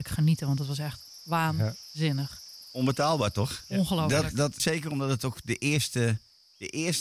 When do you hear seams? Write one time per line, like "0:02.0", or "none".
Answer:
0:04.6